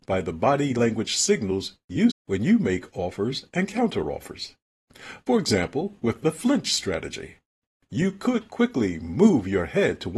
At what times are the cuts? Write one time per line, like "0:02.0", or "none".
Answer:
0:02.1
0:06.0